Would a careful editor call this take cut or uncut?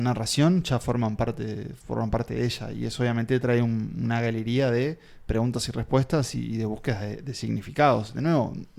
uncut